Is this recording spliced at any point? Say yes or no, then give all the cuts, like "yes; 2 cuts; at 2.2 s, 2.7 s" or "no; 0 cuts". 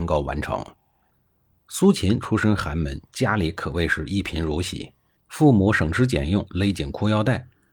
yes; 1 cut; at 5.2 s